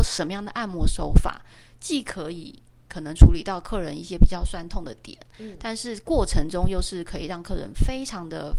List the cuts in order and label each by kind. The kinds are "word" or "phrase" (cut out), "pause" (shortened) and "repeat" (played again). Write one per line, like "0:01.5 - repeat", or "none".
none